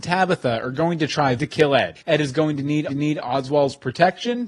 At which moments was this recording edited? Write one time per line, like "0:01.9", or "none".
0:01.4
0:02.0
0:02.9